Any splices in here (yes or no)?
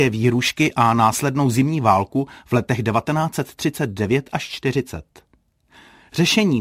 no